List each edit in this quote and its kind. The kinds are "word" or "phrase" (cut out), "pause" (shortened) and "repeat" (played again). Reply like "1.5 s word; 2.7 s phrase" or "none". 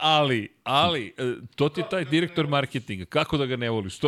none